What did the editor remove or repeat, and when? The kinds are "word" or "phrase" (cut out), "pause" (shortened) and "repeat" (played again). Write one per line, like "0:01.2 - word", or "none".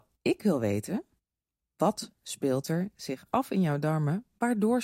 none